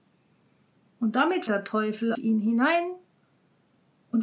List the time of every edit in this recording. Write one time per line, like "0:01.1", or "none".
0:01.5
0:02.1